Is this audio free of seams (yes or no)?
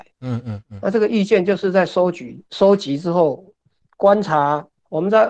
no